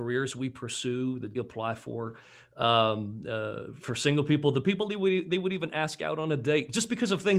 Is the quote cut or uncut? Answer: cut